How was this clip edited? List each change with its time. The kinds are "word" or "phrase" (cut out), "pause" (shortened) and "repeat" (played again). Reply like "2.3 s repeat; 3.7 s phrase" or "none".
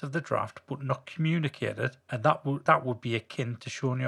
2.0 s pause; 2.7 s word

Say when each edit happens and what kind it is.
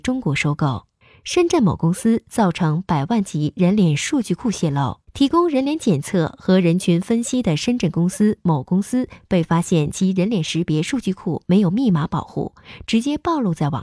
1.0 s pause; 5.0 s pause

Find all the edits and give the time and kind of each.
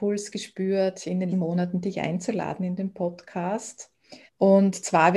1.3 s word; 4.3 s pause

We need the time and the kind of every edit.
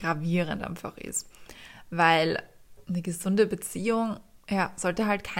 4.4 s pause

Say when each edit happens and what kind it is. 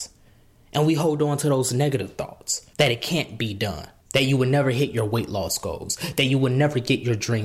2.7 s pause; 4.0 s pause

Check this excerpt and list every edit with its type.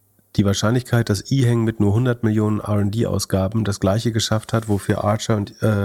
none

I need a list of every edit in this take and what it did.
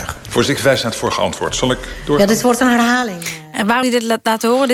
3.8 s word

